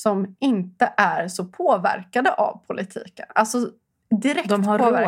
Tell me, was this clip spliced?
no; 0 cuts

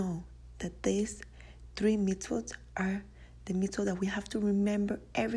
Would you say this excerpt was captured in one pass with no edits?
yes; 0 cuts

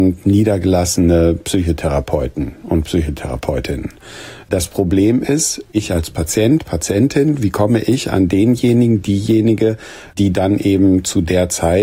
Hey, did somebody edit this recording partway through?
no; 0 cuts

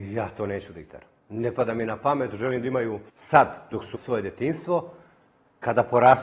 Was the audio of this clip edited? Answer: yes; 3 cuts; at 1.2 s, 3.1 s, 3.9 s

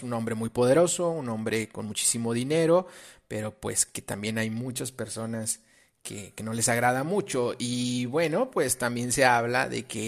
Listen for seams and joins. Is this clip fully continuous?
yes; 0 cuts

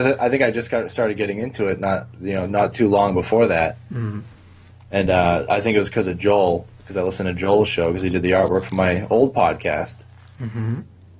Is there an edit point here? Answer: no; 0 cuts

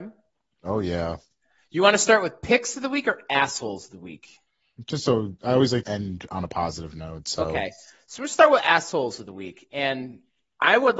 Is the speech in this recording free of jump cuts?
no; 1 cut; at 5.8 s

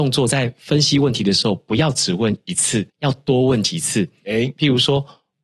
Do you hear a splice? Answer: yes; 1 cut; at 2.9 s

